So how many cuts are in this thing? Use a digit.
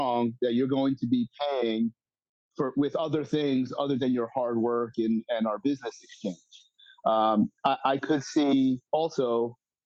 0